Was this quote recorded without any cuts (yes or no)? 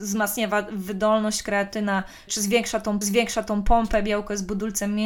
no